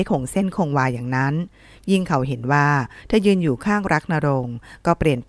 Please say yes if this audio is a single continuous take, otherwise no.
yes